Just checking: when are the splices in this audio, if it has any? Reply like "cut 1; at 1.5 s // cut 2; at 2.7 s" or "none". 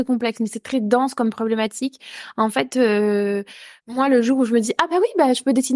cut 1; at 3.8 s